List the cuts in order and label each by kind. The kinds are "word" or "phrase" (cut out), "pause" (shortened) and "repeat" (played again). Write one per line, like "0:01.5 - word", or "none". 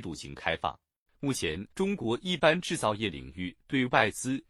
0:01.1 - pause
0:01.7 - pause